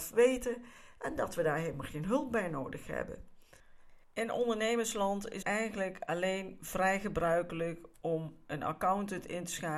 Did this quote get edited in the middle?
yes; 2 cuts; at 4.0 s, 5.4 s

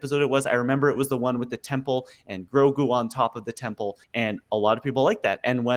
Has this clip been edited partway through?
yes; 1 cut; at 4.0 s

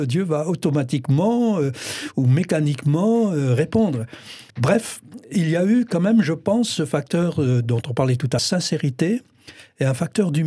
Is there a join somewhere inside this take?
yes; 2 cuts; at 4.5 s, 8.4 s

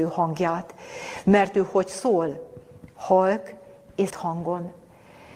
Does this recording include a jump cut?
yes; 1 cut; at 4.1 s

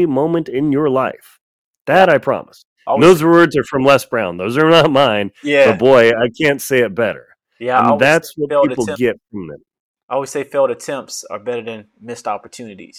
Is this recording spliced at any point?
no; 0 cuts

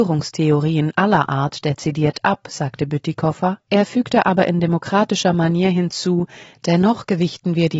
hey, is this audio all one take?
yes; 0 cuts

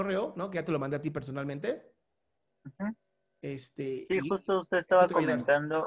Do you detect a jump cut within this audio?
no; 0 cuts

